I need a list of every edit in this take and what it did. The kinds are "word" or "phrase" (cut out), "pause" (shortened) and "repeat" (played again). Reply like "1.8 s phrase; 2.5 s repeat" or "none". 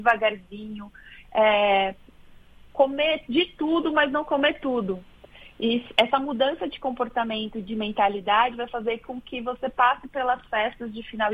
none